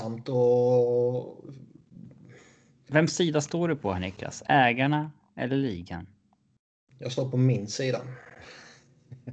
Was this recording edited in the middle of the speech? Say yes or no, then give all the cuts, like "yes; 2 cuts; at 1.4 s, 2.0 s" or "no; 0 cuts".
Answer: no; 0 cuts